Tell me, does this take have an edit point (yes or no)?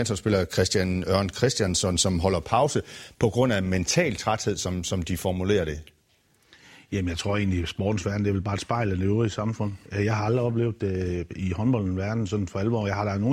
no